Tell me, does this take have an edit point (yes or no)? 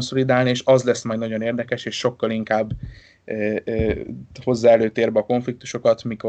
no